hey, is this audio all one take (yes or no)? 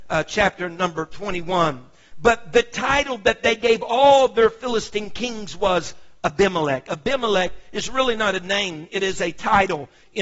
yes